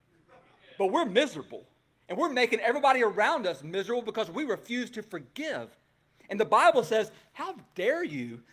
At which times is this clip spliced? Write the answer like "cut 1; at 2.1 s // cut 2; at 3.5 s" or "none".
none